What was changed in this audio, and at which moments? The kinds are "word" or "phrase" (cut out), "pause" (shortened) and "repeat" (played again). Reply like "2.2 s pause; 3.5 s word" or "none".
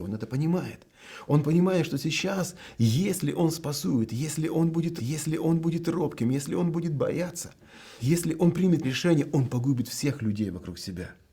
5.0 s repeat; 8.0 s word; 8.8 s word